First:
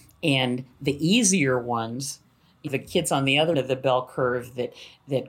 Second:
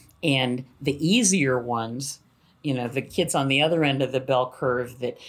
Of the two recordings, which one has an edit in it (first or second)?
first